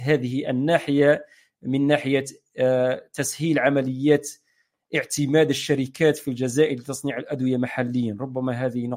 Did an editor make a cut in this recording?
no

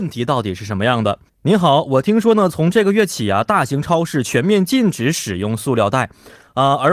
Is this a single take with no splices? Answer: no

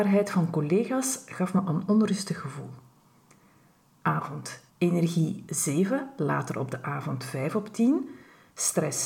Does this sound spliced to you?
yes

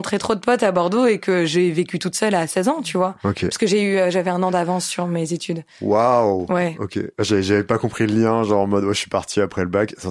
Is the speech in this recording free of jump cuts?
no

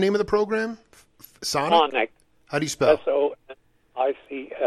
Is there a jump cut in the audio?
no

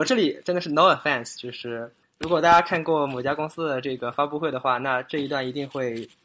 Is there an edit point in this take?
no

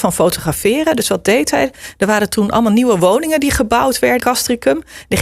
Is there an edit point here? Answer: yes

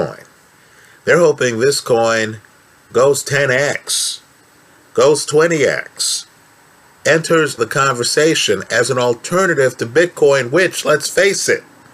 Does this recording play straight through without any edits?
no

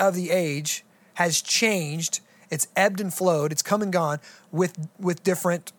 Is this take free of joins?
yes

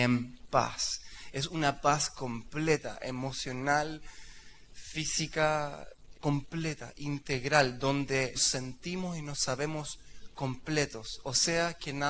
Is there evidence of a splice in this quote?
yes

